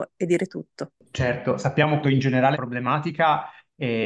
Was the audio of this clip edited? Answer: yes; 2 cuts; at 2.0 s, 2.5 s

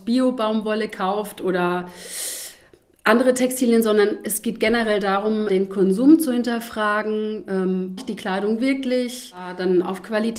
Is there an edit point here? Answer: yes; 2 cuts; at 5.5 s, 8.0 s

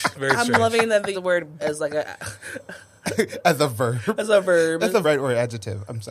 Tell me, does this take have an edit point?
yes; 3 cuts; at 1.1 s, 1.6 s, 5.0 s

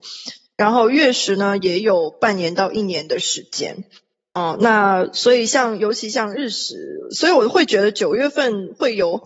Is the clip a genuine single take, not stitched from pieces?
yes; 0 cuts

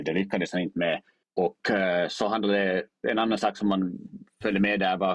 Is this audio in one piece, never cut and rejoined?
no; 1 cut; at 1.2 s

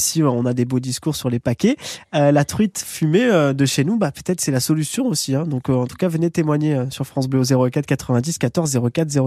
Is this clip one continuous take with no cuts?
yes; 0 cuts

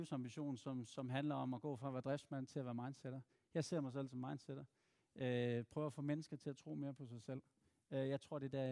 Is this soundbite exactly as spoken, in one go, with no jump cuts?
yes; 0 cuts

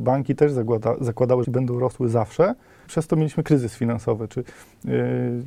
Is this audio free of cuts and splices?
no; 2 cuts; at 1.4 s, 2.9 s

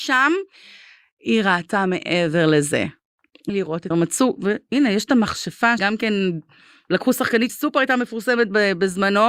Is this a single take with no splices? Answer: no; 4 cuts; at 3.5 s, 3.9 s, 5.8 s, 7.5 s

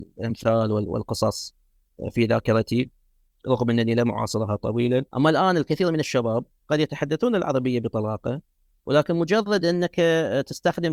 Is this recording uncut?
no; 1 cut; at 5.1 s

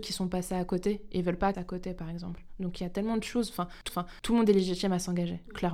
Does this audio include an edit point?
yes; 2 cuts; at 1.5 s, 3.9 s

